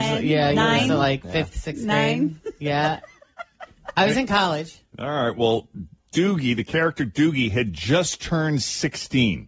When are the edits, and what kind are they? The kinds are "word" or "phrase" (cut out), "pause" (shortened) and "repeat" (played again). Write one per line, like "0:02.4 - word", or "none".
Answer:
none